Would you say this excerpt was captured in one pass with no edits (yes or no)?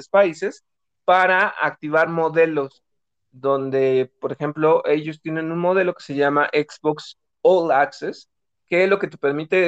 yes